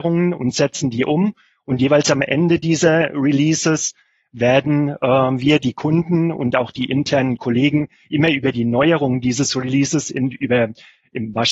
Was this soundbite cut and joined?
no; 0 cuts

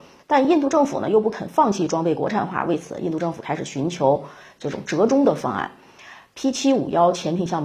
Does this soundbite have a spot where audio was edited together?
no; 0 cuts

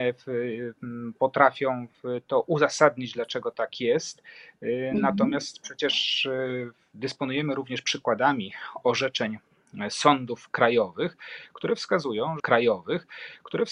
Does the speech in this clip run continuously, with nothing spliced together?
no; 1 cut; at 12.4 s

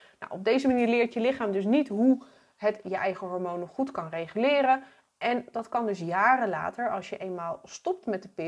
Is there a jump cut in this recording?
no; 0 cuts

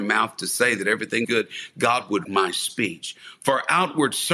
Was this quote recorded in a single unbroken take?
no; 2 cuts; at 1.2 s, 2.2 s

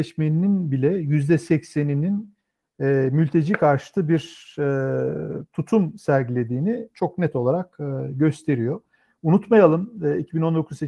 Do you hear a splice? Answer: no; 0 cuts

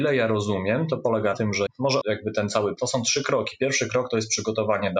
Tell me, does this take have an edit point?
yes; 4 cuts; at 1.3 s, 1.7 s, 2.0 s, 2.8 s

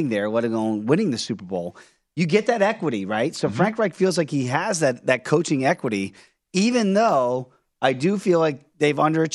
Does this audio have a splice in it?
no; 0 cuts

